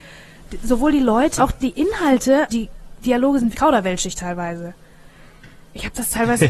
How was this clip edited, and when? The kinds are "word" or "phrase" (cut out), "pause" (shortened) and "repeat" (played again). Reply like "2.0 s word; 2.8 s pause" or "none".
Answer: 1.4 s word; 2.5 s word; 3.5 s word